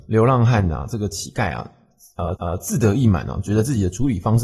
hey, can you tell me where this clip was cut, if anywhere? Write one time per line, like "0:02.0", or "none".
0:02.4